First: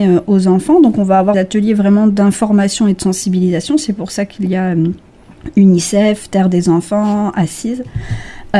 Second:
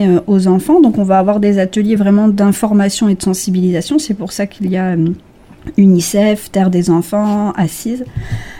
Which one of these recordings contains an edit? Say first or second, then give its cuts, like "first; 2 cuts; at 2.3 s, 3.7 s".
first; 1 cut; at 1.3 s